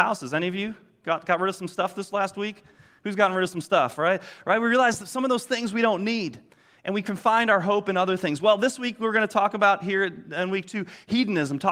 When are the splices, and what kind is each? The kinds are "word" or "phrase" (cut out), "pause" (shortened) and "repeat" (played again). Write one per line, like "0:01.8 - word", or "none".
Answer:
none

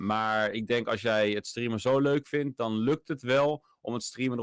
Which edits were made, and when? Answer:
none

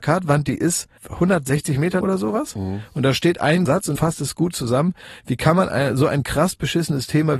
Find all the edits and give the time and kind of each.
0:01.0 - pause
0:02.0 - word
0:03.7 - word
0:04.0 - word

